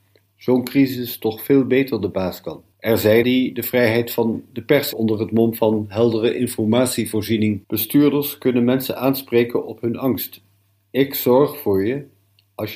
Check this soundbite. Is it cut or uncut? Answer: cut